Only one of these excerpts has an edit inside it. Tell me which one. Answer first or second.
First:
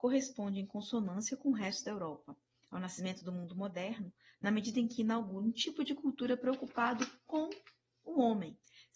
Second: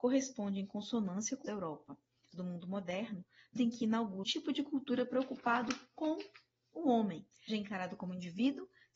second